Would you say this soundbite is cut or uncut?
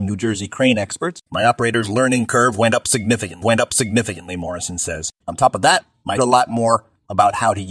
cut